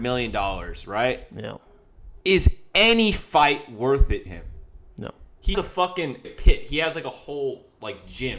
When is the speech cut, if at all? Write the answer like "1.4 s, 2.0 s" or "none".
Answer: 2.2 s, 4.3 s, 5.5 s, 6.2 s